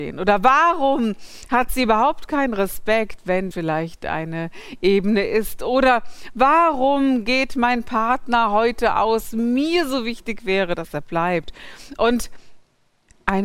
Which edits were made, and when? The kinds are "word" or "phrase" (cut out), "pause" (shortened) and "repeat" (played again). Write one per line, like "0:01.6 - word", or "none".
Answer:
0:03.5 - word
0:09.3 - phrase